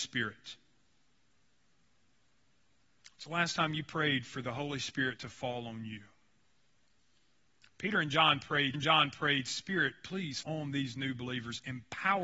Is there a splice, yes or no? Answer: yes